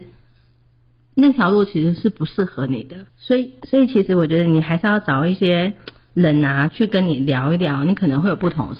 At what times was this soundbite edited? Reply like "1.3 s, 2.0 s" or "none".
3.1 s